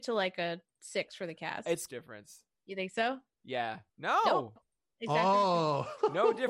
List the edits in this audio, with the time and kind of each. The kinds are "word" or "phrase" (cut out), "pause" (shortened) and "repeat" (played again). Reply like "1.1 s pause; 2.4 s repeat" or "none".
1.9 s phrase; 3.9 s pause